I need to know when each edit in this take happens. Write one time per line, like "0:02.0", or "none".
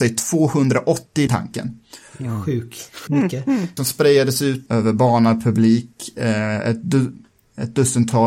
0:01.3
0:03.1
0:03.8
0:04.7